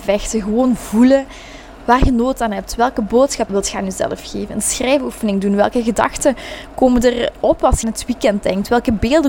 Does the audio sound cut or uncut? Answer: cut